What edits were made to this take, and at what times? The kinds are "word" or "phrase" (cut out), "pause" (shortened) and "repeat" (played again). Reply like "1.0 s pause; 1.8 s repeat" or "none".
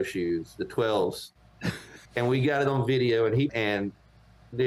2.1 s pause; 3.5 s phrase